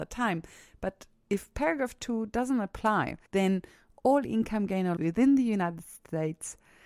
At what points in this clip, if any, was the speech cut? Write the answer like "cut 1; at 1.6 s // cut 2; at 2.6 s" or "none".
cut 1; at 3.3 s // cut 2; at 5.0 s